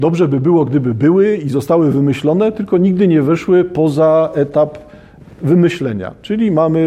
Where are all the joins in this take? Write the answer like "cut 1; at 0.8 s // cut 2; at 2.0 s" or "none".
none